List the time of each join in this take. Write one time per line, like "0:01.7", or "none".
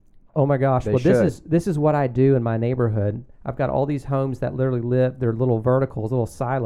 0:03.3